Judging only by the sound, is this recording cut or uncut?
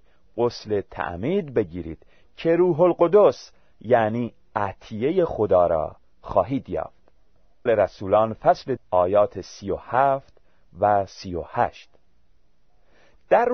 cut